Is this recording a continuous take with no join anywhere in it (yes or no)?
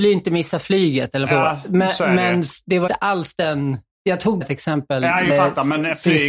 no